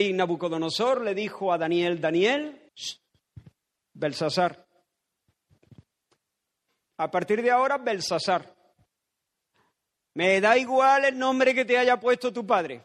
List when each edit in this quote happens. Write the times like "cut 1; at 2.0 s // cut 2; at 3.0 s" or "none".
cut 1; at 2.7 s